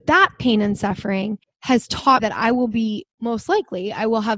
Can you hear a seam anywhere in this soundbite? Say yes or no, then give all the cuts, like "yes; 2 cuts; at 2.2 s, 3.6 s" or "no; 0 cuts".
yes; 3 cuts; at 1.4 s, 2.2 s, 3.1 s